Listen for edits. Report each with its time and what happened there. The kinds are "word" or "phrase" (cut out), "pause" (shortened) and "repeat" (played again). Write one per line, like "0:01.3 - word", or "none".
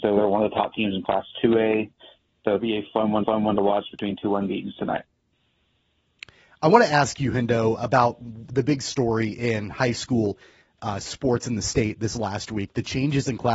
0:02.6 - word
0:03.2 - repeat
0:07.8 - word